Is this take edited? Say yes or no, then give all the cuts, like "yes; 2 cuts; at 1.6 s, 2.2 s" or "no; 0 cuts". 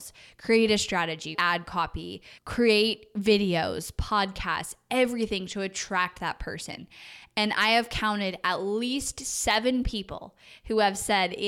yes; 2 cuts; at 1.3 s, 2.4 s